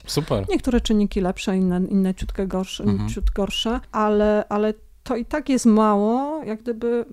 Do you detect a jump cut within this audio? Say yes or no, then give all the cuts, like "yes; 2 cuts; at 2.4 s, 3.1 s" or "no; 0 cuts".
no; 0 cuts